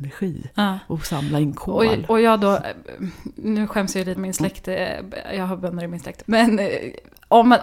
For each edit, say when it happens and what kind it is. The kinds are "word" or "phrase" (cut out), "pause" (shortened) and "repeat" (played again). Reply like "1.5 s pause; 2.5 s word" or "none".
4.2 s word; 6.2 s word